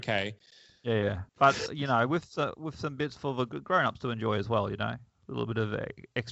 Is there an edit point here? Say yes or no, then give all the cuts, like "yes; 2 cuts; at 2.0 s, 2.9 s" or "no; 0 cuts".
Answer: yes; 1 cut; at 1.3 s